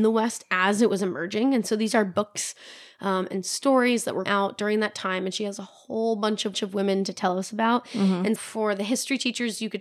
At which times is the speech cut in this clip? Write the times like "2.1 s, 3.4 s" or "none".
4.3 s, 6.5 s, 8.4 s